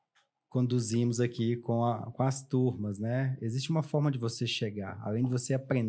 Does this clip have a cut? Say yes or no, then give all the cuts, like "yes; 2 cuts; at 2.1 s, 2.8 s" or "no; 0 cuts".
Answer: no; 0 cuts